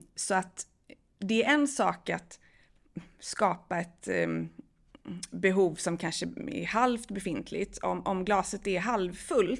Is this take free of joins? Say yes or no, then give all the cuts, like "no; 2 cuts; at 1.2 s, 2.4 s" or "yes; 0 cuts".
yes; 0 cuts